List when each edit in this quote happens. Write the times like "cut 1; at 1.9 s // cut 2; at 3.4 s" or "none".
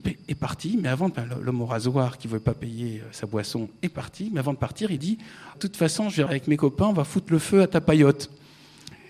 cut 1; at 1.1 s // cut 2; at 5.0 s // cut 3; at 5.5 s // cut 4; at 6.3 s

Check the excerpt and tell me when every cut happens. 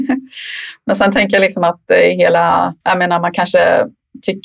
cut 1; at 2.8 s

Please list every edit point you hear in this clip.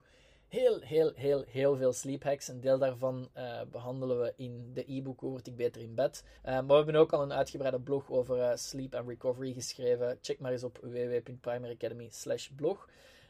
cut 1; at 6.4 s

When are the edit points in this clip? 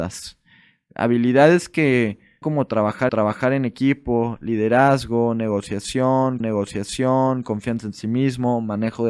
cut 1; at 2.4 s // cut 2; at 3.1 s // cut 3; at 6.4 s

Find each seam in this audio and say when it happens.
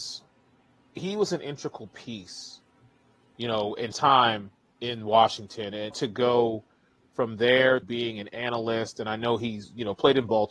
cut 1; at 3.9 s // cut 2; at 5.9 s // cut 3; at 7.8 s

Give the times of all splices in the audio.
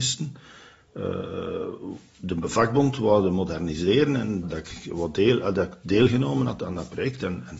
cut 1; at 4.4 s

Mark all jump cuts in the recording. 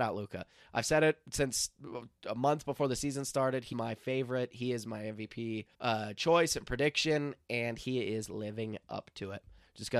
cut 1; at 3.7 s // cut 2; at 5.7 s

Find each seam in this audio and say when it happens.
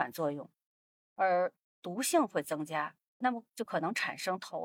cut 1; at 3.2 s

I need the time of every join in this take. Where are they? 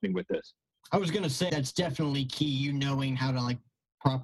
cut 1; at 1.5 s

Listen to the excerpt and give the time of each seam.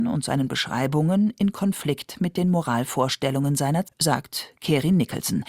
cut 1; at 3.8 s

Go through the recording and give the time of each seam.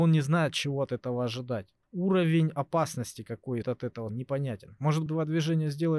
cut 1; at 1.8 s // cut 2; at 3.6 s // cut 3; at 4.1 s // cut 4; at 5.1 s

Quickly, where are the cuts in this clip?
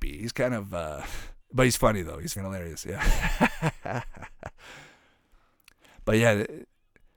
cut 1; at 1.4 s // cut 2; at 2.4 s

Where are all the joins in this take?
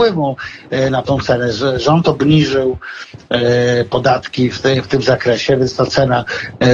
none

